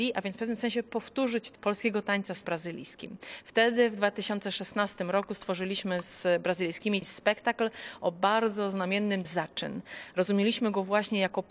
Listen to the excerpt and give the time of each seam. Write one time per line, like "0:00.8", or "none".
0:01.6
0:02.4
0:07.0
0:09.2